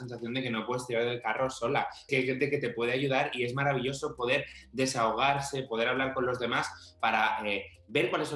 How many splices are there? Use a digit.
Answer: 1